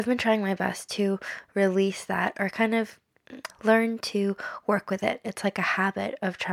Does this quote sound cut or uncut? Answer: cut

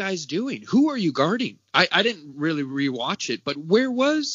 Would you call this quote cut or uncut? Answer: uncut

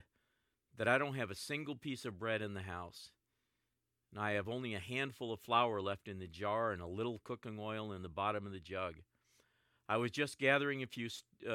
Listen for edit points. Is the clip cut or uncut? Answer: uncut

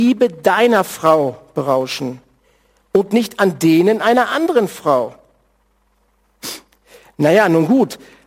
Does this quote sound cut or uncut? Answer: uncut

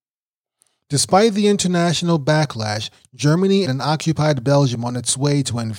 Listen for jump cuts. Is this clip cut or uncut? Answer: cut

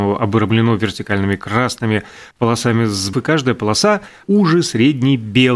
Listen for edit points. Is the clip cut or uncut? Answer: cut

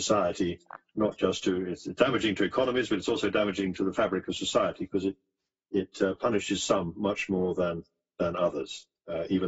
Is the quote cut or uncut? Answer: uncut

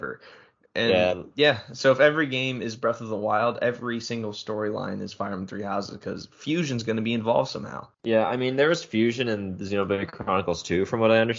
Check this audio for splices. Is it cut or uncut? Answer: cut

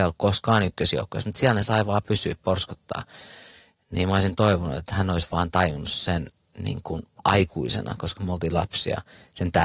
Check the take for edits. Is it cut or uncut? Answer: uncut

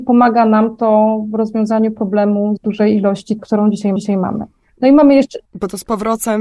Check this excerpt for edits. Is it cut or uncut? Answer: cut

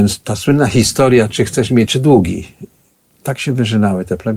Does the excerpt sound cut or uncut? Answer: cut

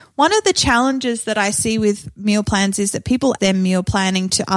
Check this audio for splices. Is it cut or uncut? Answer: cut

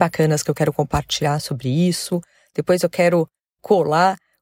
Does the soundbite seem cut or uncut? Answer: uncut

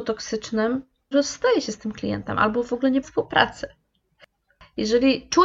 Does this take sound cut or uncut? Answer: cut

